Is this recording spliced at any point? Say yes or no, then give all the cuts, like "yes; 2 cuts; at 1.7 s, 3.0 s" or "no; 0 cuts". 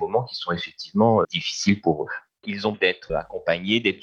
yes; 3 cuts; at 1.2 s, 2.7 s, 3.1 s